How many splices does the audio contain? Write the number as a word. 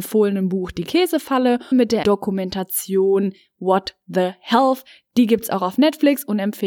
two